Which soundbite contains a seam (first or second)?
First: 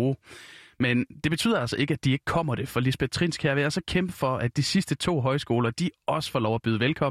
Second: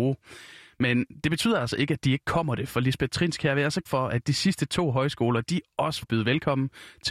second